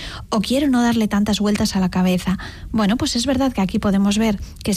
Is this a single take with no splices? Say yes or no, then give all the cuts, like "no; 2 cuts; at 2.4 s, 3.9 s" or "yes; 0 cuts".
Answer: yes; 0 cuts